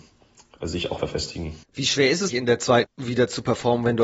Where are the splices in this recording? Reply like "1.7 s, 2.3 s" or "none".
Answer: 1.0 s, 1.6 s, 2.3 s, 2.8 s